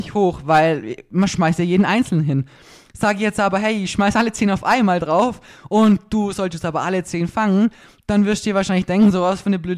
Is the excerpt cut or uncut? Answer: uncut